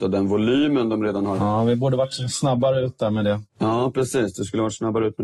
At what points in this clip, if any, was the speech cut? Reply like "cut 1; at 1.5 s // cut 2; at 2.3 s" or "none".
cut 1; at 3.5 s